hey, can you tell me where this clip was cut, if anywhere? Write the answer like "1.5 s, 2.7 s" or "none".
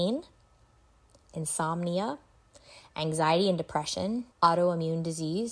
4.3 s